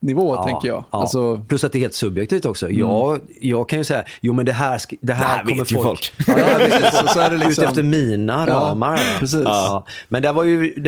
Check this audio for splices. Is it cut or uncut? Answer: uncut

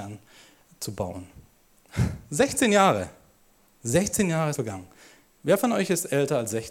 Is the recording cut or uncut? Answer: cut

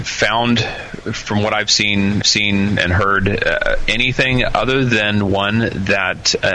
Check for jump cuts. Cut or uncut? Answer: cut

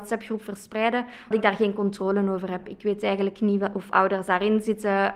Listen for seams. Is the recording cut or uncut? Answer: cut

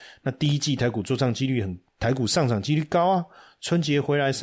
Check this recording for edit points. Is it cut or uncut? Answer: uncut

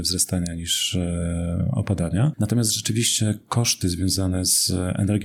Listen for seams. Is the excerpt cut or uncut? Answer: uncut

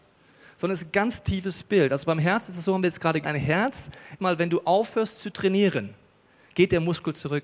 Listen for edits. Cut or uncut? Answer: cut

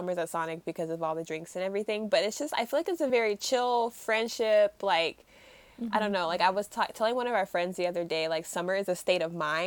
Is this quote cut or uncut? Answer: uncut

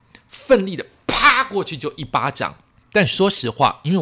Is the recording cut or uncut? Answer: cut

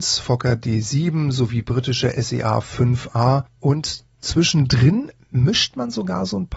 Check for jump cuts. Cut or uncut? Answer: uncut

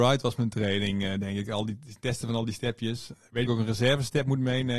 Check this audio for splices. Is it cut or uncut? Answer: cut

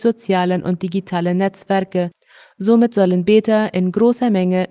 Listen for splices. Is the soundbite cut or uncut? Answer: uncut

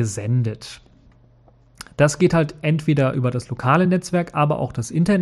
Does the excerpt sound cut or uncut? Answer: uncut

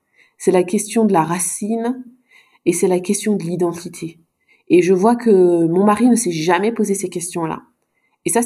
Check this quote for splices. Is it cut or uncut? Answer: uncut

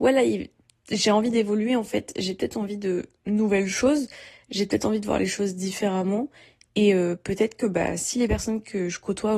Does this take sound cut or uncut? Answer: uncut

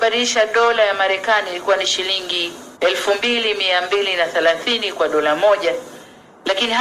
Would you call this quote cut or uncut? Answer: cut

